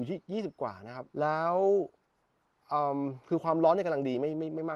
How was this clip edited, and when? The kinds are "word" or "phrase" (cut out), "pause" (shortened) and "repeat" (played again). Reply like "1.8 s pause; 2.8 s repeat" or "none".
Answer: 1.1 s pause